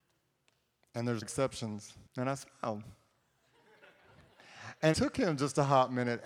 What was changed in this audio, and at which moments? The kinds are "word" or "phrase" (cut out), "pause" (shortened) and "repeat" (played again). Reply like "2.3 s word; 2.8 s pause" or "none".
1.2 s word; 2.1 s pause; 4.9 s word